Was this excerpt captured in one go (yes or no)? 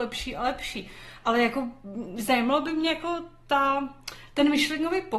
yes